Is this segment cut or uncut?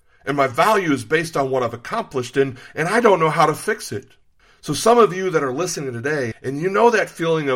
cut